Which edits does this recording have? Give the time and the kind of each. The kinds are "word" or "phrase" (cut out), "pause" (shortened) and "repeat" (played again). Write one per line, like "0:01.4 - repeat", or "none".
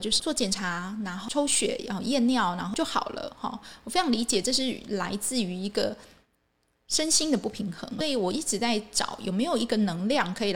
0:08.0 - word